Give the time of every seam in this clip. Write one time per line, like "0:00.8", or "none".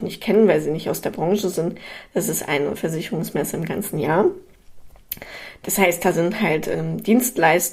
0:02.8